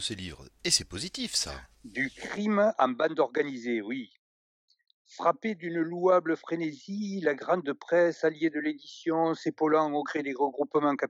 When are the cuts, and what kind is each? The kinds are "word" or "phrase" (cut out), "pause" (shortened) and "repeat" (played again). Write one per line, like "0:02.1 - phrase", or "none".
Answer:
none